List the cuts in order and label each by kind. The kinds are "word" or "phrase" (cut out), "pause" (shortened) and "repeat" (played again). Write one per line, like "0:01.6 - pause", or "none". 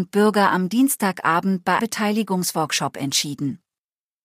0:01.8 - word